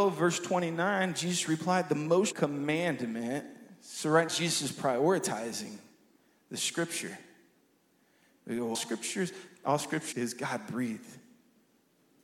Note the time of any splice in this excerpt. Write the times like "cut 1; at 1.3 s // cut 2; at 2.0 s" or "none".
cut 1; at 2.3 s // cut 2; at 4.3 s // cut 3; at 8.7 s // cut 4; at 10.1 s